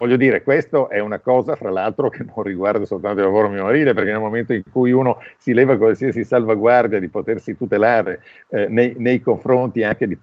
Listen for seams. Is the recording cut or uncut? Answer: uncut